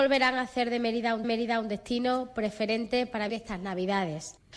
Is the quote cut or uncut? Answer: cut